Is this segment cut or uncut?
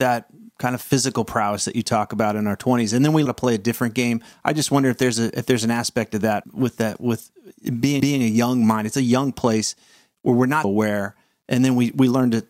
cut